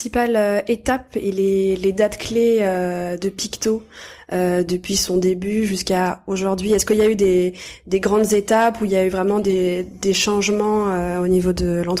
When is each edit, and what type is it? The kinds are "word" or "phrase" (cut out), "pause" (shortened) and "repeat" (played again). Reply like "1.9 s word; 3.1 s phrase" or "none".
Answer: none